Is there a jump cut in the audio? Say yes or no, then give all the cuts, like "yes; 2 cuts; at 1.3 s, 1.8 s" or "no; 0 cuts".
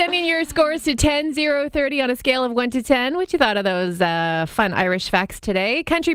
no; 0 cuts